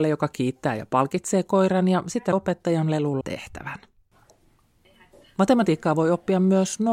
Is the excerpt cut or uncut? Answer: cut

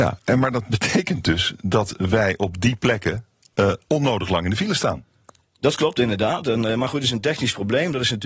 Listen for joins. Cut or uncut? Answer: uncut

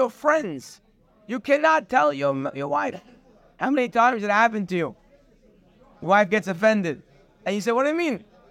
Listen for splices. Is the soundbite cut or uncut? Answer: uncut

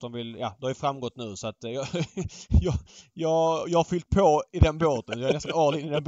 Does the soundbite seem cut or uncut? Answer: uncut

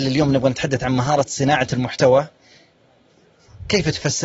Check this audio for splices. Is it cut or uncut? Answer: uncut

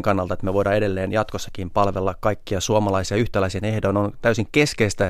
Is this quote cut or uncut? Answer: uncut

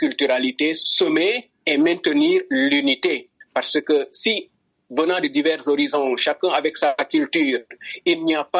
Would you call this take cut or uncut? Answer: uncut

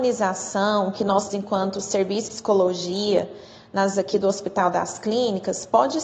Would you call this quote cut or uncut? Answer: cut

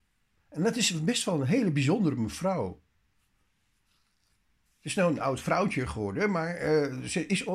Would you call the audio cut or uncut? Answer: uncut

